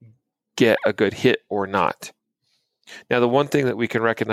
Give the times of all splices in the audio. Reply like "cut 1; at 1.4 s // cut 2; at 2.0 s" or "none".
none